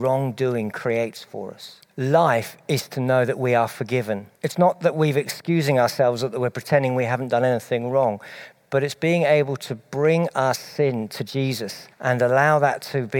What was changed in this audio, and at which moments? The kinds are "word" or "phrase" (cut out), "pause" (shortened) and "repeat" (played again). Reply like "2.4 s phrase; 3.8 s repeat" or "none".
1.9 s pause; 4.4 s pause; 11.9 s pause